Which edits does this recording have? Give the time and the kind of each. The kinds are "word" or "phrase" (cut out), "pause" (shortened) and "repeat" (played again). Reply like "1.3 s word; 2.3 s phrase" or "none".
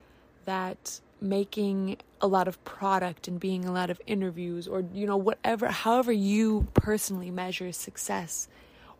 none